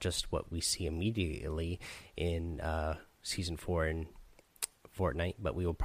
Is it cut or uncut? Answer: uncut